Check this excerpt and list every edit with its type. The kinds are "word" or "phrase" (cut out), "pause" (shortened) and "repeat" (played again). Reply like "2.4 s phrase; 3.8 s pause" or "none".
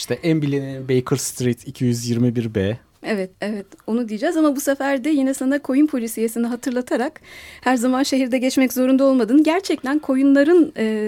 3.3 s pause